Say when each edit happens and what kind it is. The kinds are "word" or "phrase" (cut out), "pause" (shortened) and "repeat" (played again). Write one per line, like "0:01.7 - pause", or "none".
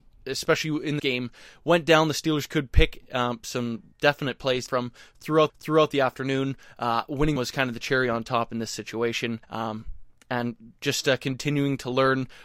0:01.0 - phrase
0:03.9 - pause
0:04.7 - phrase
0:05.5 - repeat
0:07.4 - phrase
0:09.4 - pause